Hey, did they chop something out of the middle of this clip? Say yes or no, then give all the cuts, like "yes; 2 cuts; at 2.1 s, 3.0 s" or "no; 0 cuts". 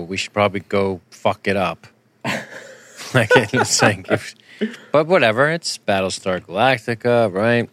yes; 2 cuts; at 1.0 s, 1.9 s